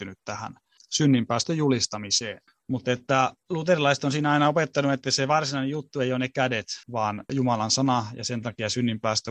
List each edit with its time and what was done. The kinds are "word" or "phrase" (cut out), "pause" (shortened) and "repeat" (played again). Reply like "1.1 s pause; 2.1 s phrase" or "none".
2.5 s pause; 6.8 s pause

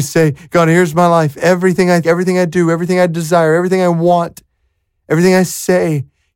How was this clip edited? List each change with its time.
2.0 s word

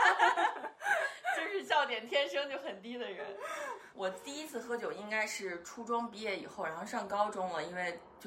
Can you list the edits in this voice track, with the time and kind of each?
3.9 s pause

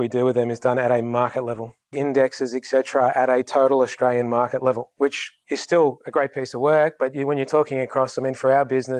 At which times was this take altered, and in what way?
none

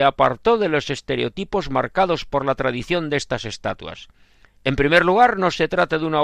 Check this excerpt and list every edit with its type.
none

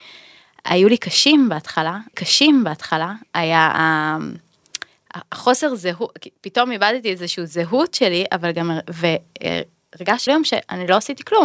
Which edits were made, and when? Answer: 2.1 s repeat; 10.3 s phrase

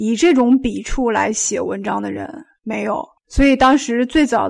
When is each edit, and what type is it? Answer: 3.2 s pause

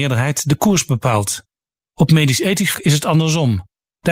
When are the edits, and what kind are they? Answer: 2.7 s word

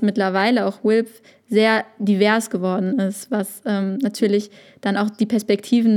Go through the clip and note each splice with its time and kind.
none

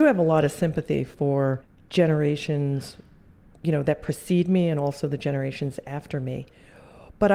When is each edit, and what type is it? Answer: none

